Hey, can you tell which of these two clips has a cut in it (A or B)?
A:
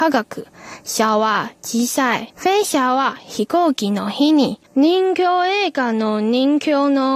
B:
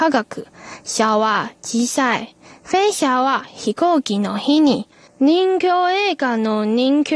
A